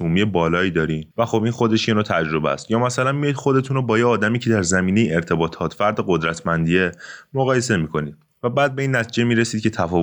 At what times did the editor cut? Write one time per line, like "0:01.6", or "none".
0:01.1